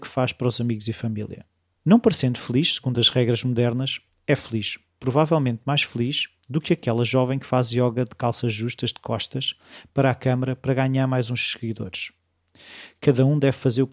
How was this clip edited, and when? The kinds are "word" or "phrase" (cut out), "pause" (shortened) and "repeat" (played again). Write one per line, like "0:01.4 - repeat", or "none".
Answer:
none

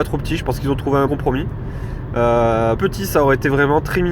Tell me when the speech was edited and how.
0:01.1 - word
0:02.8 - word

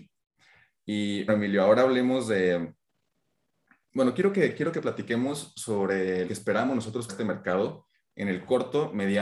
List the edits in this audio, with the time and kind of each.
0:01.3 - word
0:06.3 - word
0:07.1 - word

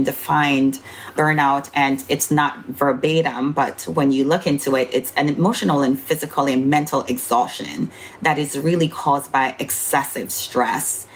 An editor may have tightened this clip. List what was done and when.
none

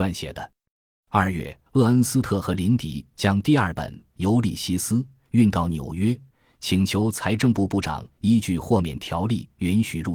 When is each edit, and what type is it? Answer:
0:01.7 - pause

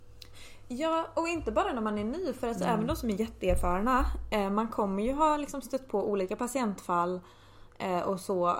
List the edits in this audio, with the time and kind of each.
none

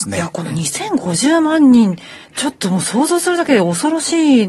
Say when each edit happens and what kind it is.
0:02.2 - pause

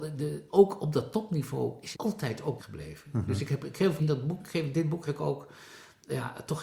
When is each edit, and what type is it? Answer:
0:01.9 - word
0:02.6 - word
0:04.0 - word
0:05.1 - word

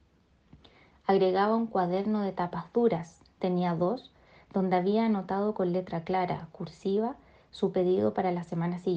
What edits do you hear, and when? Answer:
none

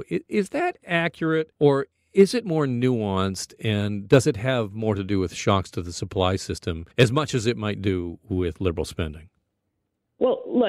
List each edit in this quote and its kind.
0:01.5 - pause
0:06.9 - pause

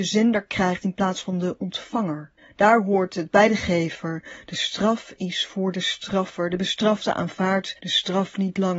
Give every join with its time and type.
0:02.4 - pause
0:07.8 - pause

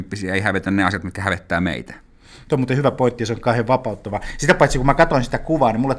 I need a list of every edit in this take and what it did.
none

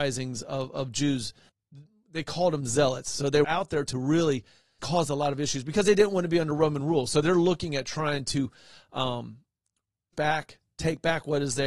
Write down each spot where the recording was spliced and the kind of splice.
0:03.4 - word
0:03.9 - word
0:04.8 - word
0:10.1 - word

